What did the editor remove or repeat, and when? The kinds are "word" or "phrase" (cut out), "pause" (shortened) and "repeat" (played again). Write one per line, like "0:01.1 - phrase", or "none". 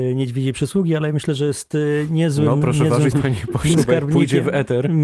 0:03.1 - word
0:03.7 - word